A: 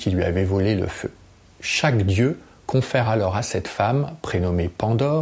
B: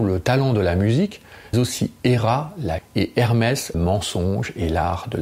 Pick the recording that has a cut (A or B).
B